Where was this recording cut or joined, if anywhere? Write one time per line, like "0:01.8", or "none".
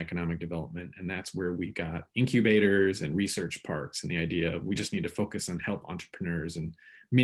none